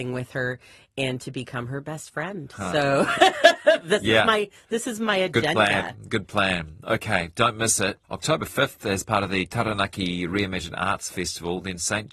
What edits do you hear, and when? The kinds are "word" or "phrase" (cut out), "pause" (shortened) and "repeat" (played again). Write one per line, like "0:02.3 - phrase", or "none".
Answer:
0:08.0 - pause